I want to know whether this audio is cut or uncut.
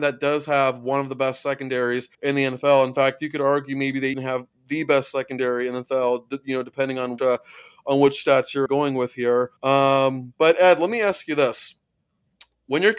cut